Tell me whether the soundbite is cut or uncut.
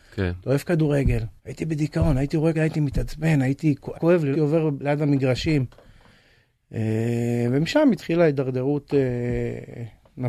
cut